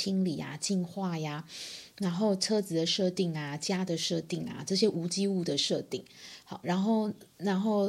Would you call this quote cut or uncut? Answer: uncut